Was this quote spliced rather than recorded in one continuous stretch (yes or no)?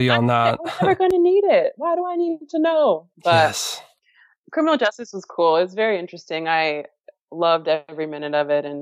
yes